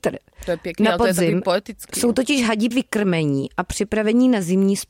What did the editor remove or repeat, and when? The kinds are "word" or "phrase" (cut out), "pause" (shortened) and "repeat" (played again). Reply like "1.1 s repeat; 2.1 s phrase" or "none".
2.7 s word